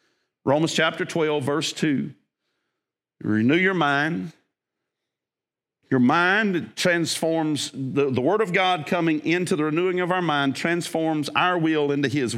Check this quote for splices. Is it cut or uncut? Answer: uncut